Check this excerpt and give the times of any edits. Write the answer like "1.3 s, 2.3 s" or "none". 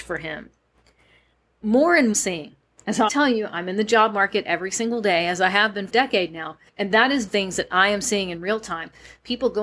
2.1 s, 3.1 s, 5.9 s, 6.7 s, 7.3 s